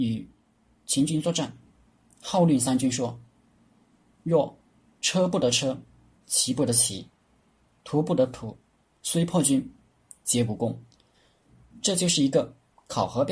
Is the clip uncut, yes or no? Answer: yes